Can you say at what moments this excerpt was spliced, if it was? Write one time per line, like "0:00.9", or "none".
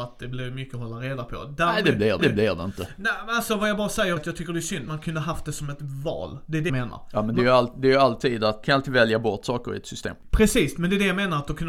0:02.2
0:04.2
0:04.9
0:06.7
0:08.6

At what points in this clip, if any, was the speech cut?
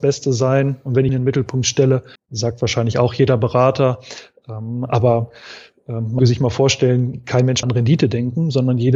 0:01.1
0:02.2
0:06.2
0:07.6

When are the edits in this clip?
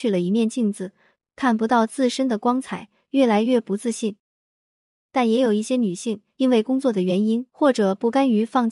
none

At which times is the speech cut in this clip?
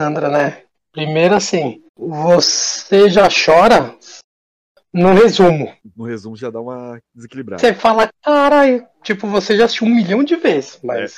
0:01.9
0:05.8

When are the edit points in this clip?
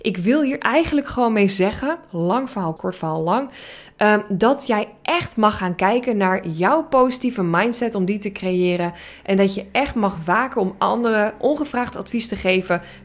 0:02.8

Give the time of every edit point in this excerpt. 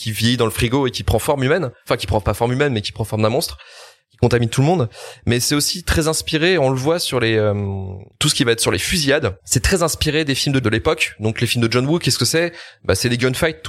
0:08.1
0:09.4
0:10.6

